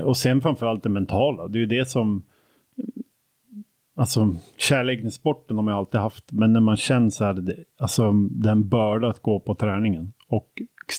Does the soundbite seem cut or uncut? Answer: uncut